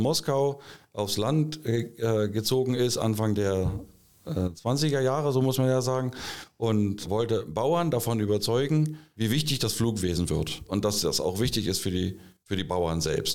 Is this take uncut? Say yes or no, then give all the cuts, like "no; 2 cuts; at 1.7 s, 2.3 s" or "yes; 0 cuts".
yes; 0 cuts